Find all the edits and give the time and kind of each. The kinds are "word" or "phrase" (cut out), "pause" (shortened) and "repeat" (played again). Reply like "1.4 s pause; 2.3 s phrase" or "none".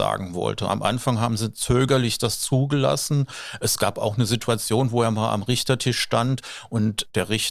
none

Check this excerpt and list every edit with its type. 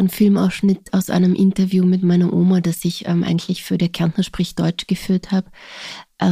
none

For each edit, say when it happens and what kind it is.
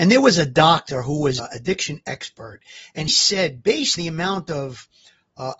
1.4 s word; 3.1 s word; 4.0 s word

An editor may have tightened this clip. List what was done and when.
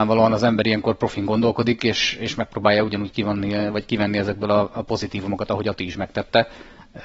none

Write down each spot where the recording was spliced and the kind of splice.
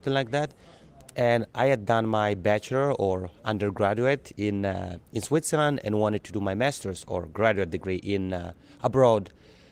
none

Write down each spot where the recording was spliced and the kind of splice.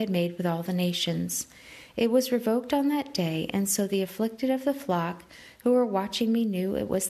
none

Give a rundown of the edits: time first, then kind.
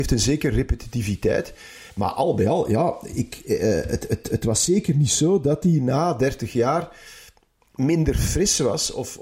none

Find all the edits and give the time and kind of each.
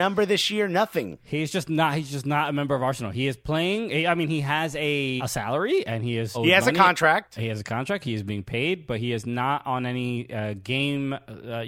5.2 s word; 6.3 s word

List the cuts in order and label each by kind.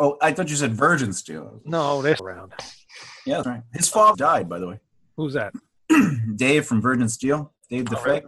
2.2 s word; 3.4 s word; 4.1 s word

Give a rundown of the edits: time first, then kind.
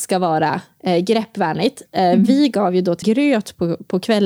3.0 s word

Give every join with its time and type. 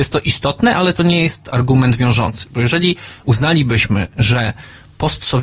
none

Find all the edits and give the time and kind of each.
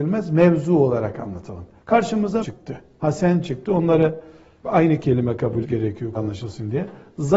2.4 s word; 3.0 s word; 4.6 s word; 5.6 s word; 6.2 s word

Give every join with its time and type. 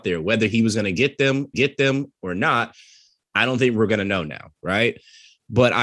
1.5 s repeat

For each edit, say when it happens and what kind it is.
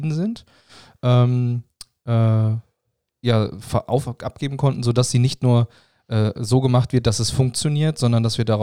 none

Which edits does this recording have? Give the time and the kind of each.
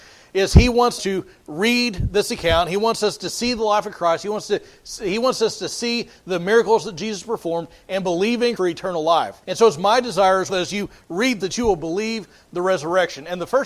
1.0 s word; 8.6 s word; 9.4 s pause; 10.5 s word; 11.4 s word

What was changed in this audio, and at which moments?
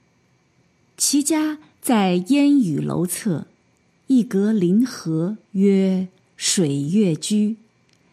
3.9 s pause; 5.4 s pause

